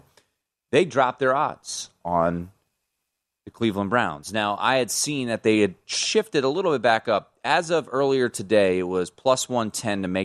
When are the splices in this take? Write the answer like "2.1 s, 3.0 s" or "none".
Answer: none